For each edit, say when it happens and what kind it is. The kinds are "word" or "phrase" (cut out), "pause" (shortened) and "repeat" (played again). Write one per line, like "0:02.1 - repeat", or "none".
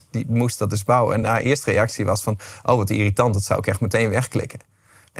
none